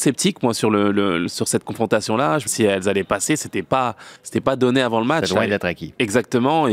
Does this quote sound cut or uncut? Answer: cut